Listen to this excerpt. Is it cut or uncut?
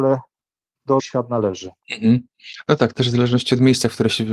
cut